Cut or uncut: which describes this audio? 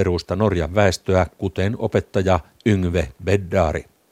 uncut